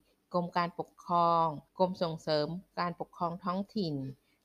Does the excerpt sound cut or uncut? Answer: cut